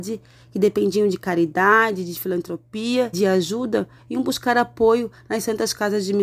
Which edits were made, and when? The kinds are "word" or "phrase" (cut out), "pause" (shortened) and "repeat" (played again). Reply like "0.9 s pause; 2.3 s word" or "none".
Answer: 3.1 s word